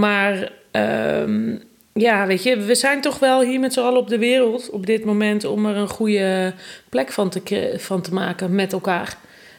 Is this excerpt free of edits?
yes; 0 cuts

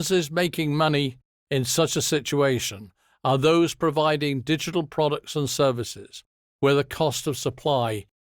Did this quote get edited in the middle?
no; 0 cuts

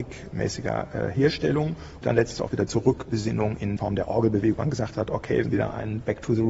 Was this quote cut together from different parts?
yes; 5 cuts; at 2.0 s, 2.3 s, 3.8 s, 4.5 s, 5.4 s

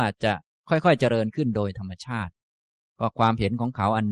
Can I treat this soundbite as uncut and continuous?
yes; 0 cuts

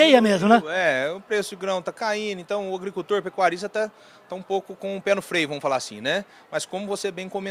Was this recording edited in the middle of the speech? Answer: no; 0 cuts

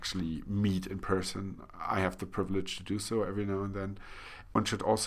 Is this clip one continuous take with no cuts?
yes; 0 cuts

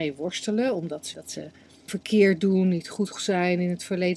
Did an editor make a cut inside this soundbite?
yes; 3 cuts; at 1.1 s, 1.9 s, 3.1 s

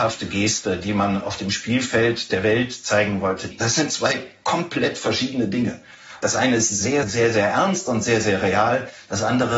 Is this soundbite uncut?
no; 1 cut; at 7.0 s

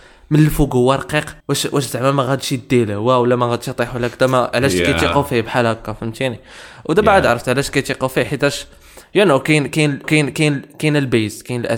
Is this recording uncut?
no; 2 cuts; at 1.4 s, 10.0 s

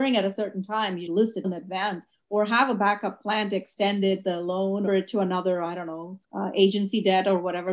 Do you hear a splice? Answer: yes; 4 cuts; at 1.1 s, 1.4 s, 4.9 s, 6.2 s

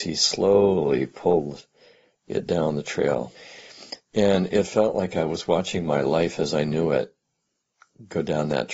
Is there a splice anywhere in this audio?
no; 0 cuts

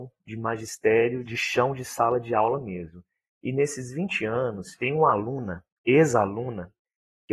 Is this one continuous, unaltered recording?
yes; 0 cuts

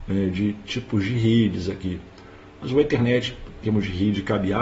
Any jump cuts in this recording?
yes; 1 cut; at 3.6 s

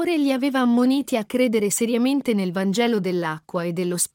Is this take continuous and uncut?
yes; 0 cuts

